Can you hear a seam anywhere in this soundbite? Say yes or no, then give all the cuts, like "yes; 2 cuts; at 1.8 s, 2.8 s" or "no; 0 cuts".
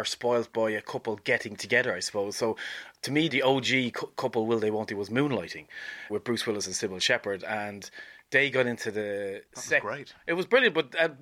yes; 2 cuts; at 3.3 s, 6.1 s